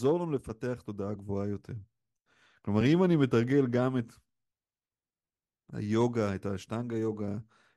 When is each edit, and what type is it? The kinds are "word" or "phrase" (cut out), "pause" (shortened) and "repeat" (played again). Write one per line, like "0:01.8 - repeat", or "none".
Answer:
none